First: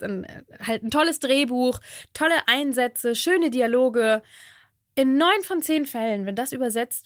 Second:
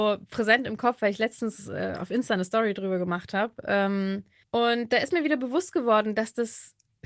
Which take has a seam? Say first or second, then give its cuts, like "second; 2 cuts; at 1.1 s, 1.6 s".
second; 1 cut; at 4.4 s